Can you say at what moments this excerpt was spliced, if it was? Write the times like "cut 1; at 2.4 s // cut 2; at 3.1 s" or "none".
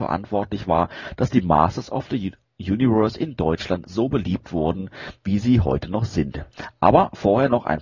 none